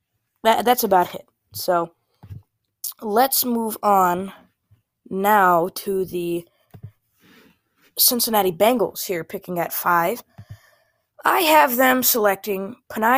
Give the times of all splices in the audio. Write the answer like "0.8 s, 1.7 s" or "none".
none